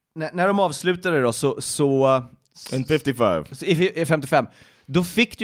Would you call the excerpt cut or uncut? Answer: uncut